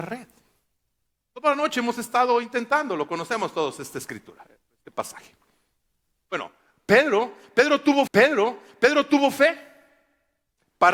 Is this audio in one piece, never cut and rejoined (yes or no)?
no